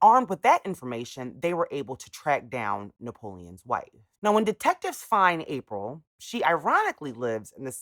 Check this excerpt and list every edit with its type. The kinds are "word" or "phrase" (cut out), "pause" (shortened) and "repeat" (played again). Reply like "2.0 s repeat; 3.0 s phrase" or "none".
4.2 s pause